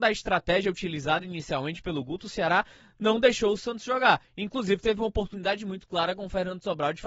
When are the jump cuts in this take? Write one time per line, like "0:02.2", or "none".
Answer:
none